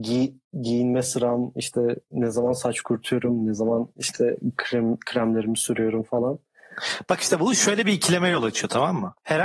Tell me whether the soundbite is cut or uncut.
uncut